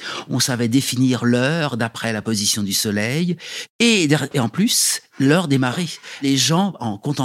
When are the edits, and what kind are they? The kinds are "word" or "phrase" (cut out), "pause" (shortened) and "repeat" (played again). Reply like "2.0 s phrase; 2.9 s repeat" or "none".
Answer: none